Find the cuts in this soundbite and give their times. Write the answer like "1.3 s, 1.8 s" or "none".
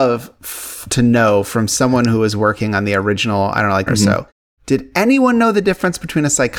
3.9 s